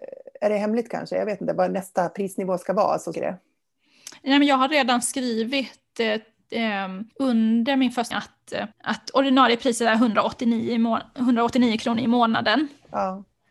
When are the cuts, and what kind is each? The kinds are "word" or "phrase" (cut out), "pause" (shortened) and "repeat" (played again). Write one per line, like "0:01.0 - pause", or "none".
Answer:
0:03.1 - phrase
0:07.1 - pause
0:08.1 - word
0:08.7 - pause